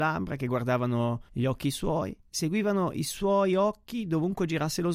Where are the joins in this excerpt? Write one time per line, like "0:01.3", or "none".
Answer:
0:01.3
0:02.2